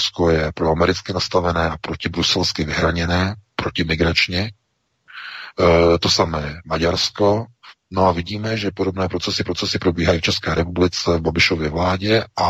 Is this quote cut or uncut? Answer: cut